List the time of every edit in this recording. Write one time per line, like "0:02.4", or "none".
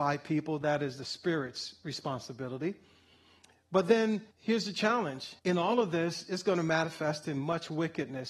0:04.3
0:05.4